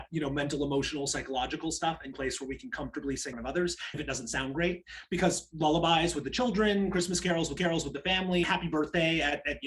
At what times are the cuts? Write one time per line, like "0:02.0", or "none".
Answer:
0:02.1
0:03.3
0:03.9
0:07.6
0:08.4